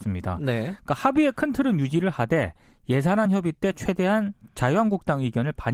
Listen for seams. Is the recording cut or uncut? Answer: uncut